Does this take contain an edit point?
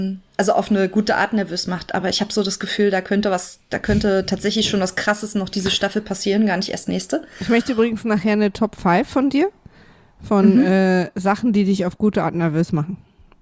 no; 0 cuts

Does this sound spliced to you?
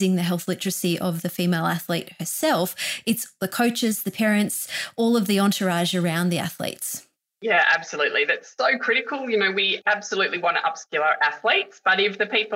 yes; 1 cut; at 7.1 s

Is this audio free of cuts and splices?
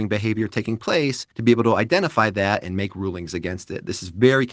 no; 1 cut; at 1.3 s

